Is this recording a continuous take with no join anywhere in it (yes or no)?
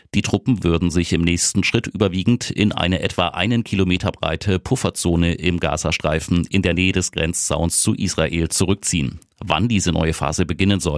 yes